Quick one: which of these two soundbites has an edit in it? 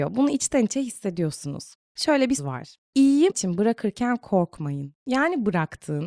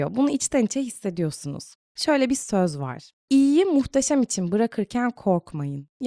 first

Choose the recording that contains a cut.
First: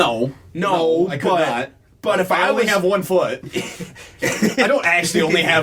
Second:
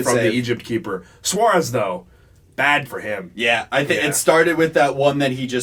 second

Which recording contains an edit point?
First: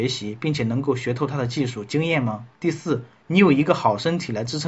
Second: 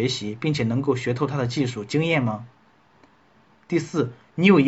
first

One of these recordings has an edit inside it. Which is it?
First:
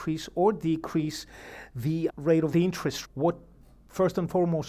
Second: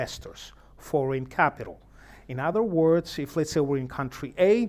first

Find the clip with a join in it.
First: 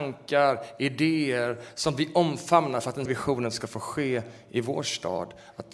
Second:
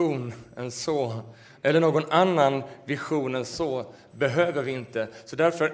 first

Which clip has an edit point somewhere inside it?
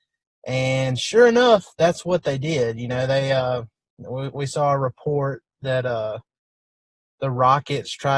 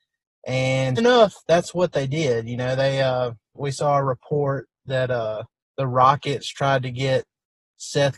second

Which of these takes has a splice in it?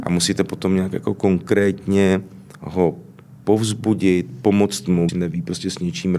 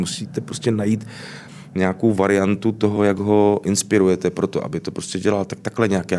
first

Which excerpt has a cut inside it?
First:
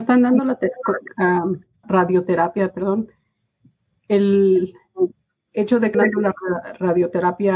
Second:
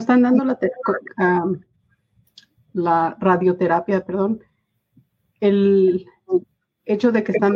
first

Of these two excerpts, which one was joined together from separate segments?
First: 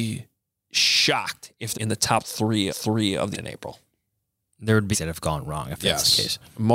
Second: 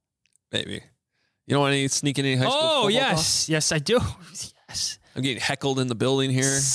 first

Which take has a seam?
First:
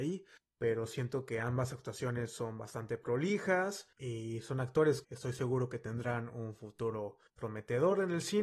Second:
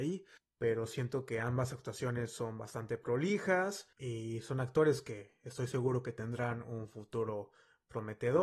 first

